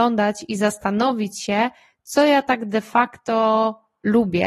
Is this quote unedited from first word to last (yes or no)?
yes